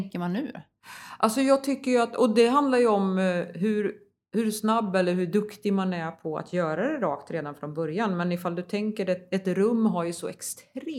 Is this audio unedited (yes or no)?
yes